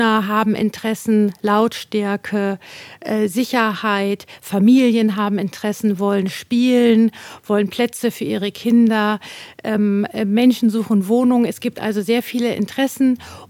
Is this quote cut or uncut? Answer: uncut